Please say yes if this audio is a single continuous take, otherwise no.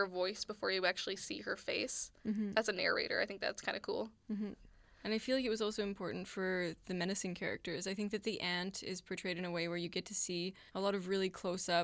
no